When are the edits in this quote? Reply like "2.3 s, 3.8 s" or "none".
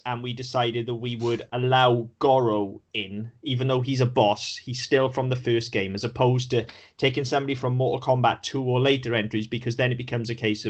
none